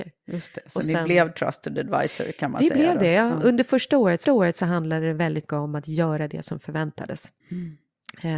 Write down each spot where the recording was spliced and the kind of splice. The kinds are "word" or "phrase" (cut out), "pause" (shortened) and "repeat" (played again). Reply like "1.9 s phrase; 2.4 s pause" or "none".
4.2 s repeat; 5.5 s word; 7.4 s pause